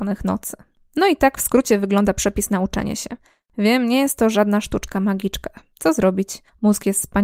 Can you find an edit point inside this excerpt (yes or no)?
no